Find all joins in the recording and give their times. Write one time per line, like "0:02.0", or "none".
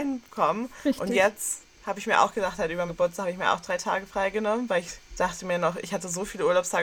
0:02.9